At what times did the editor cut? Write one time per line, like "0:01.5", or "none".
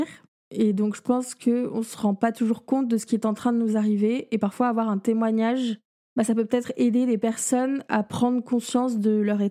none